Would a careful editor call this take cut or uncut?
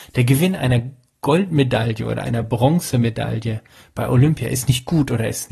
uncut